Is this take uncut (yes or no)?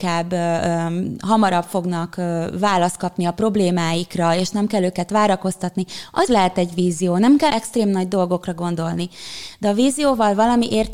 no